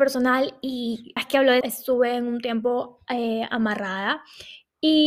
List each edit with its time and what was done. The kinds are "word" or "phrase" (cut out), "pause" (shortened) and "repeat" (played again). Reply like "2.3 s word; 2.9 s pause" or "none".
1.2 s phrase; 1.6 s phrase